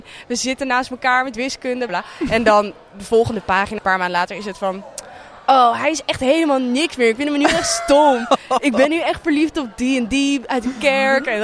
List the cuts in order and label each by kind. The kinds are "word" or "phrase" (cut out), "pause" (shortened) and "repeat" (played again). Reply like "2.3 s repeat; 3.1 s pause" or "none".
1.9 s word; 3.8 s word